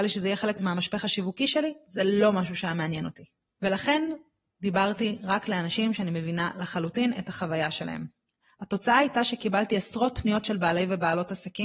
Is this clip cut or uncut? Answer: uncut